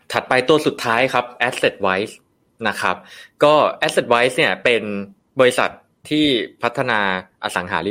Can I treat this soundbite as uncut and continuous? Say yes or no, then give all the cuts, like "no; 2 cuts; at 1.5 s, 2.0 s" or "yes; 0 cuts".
no; 1 cut; at 5.2 s